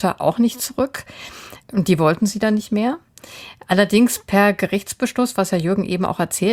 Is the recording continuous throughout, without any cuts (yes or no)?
no